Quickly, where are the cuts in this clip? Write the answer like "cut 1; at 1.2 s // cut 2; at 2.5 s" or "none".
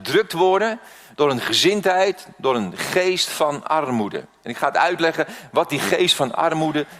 none